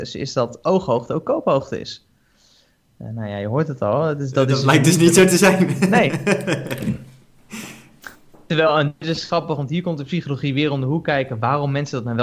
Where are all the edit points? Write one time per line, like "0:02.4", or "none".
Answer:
none